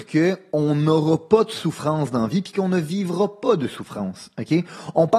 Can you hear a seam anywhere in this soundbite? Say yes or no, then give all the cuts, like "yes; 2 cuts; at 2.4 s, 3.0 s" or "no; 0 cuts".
no; 0 cuts